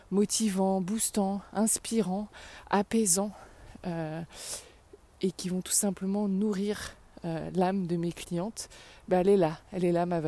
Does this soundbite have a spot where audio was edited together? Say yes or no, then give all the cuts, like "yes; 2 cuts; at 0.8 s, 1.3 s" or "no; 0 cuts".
no; 0 cuts